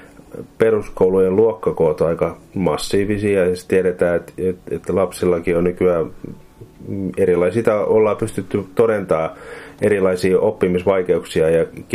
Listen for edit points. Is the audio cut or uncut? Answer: cut